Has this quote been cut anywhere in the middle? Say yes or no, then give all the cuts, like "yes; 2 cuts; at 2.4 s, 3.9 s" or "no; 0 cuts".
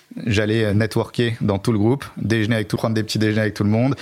yes; 1 cut; at 2.8 s